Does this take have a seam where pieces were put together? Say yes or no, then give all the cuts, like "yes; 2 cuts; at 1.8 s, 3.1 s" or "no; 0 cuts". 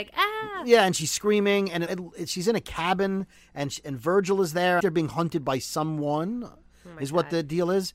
yes; 2 cuts; at 1.9 s, 4.8 s